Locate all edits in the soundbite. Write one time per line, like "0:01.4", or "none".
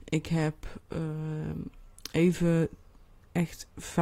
none

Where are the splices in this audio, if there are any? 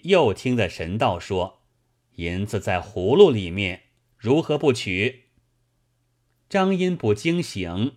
0:01.7

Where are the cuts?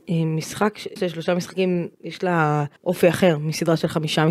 0:01.0
0:01.9
0:02.8

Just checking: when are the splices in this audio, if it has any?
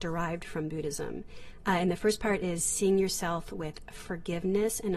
none

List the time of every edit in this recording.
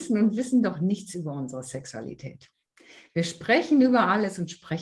none

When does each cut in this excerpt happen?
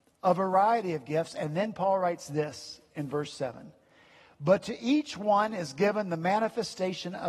none

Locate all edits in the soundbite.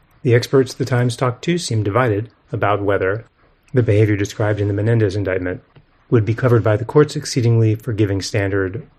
none

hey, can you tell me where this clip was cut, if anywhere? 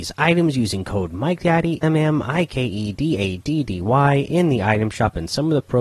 0:01.8

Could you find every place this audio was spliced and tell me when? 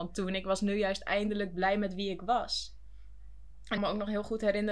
0:03.8

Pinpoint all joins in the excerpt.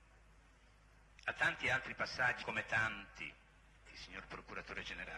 0:02.4

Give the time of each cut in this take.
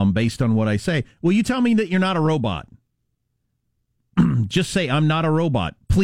none

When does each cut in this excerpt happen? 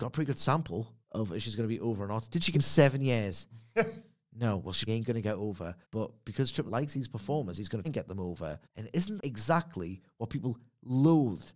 0:01.0
0:02.5
0:04.9
0:05.8
0:06.7
0:07.8
0:08.6
0:09.2

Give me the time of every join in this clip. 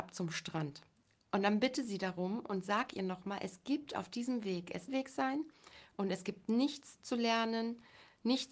0:04.9

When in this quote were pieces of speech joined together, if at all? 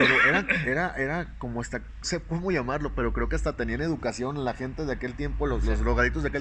0:02.0

